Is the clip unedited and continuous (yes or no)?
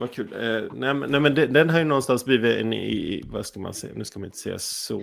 yes